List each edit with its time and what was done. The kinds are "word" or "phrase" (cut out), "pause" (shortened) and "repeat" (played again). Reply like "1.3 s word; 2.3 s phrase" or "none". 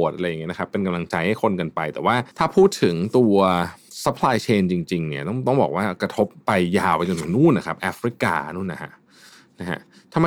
2.3 s pause